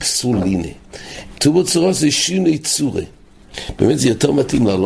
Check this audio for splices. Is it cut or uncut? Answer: cut